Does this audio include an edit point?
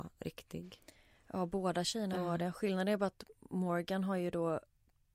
no; 0 cuts

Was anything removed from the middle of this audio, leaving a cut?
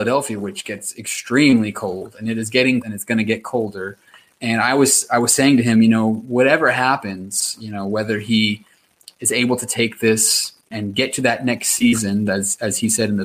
yes; 2 cuts; at 2.8 s, 10.7 s

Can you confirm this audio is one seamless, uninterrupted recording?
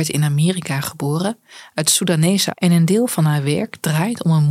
no; 1 cut; at 2.5 s

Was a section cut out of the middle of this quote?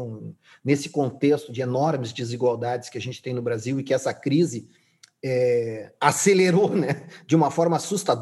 no; 0 cuts

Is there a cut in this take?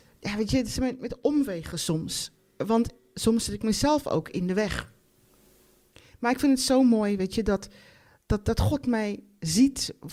no; 0 cuts

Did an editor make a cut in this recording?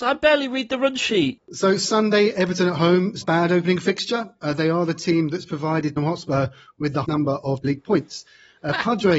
yes; 4 cuts; at 3.2 s, 6.0 s, 7.0 s, 7.6 s

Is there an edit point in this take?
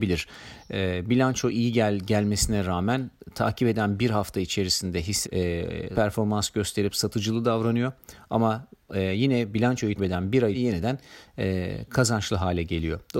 yes; 4 cuts; at 5.2 s, 5.9 s, 10.0 s, 10.5 s

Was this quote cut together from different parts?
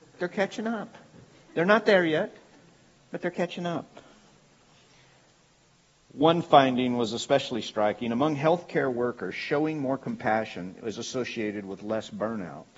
no; 0 cuts

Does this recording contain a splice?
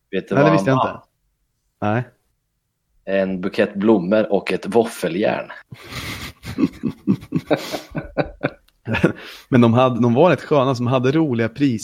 no; 0 cuts

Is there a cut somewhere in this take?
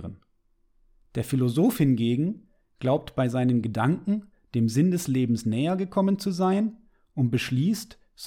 no; 0 cuts

